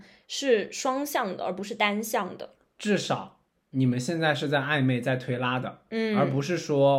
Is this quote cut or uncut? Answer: uncut